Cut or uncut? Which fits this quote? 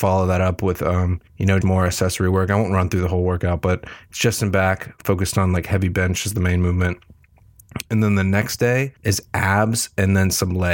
cut